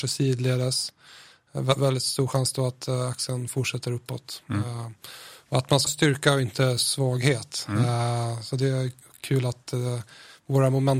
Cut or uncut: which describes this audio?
cut